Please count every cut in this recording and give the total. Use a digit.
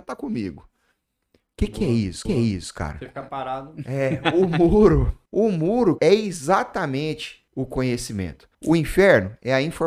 5